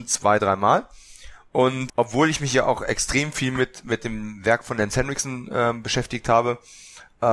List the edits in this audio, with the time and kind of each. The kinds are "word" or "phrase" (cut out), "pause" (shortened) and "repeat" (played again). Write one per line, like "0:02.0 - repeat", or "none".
0:01.9 - word